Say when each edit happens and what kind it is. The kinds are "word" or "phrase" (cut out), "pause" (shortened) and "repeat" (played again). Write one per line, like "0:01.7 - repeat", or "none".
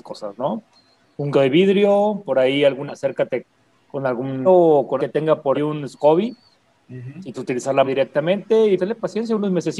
0:01.3 - word
0:02.9 - word
0:04.5 - word
0:05.0 - word
0:05.5 - word
0:07.3 - word
0:07.9 - word
0:08.8 - word

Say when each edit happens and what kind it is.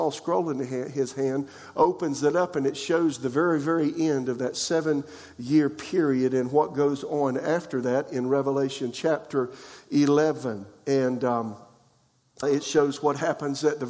0:12.4 - word

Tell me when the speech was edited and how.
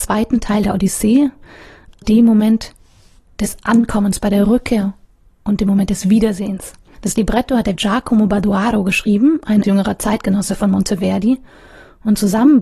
0:02.0 - word
0:07.7 - word
0:09.6 - word

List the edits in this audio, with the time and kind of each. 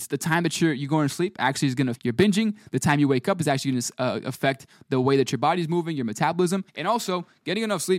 0:01.9 - word
0:06.7 - pause

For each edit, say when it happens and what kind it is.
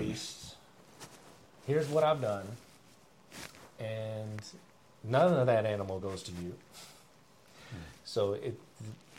none

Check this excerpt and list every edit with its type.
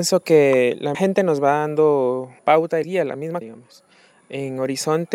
0:00.9 - word
0:02.4 - word
0:02.8 - word
0:03.4 - word

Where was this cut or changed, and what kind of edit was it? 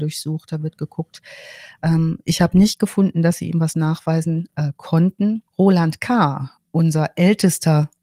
0:05.5 - pause

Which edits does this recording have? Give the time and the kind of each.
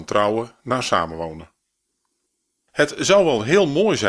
none

